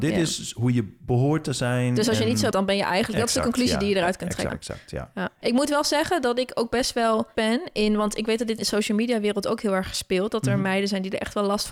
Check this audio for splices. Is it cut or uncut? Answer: cut